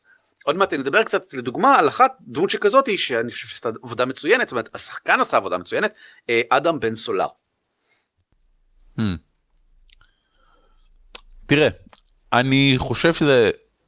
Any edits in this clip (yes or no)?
no